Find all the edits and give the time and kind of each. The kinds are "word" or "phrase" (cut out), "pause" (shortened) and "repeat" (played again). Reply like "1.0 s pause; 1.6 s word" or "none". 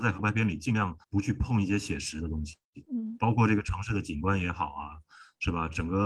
1.0 s pause